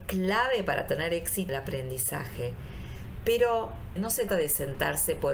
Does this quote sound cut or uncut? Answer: cut